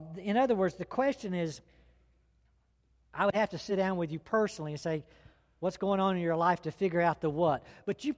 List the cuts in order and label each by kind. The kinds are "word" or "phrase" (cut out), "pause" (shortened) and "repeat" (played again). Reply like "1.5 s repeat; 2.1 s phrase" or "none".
none